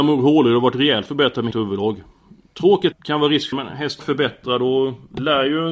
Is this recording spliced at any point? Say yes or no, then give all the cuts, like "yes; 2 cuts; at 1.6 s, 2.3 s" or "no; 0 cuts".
yes; 4 cuts; at 1.5 s, 2.9 s, 3.5 s, 4.0 s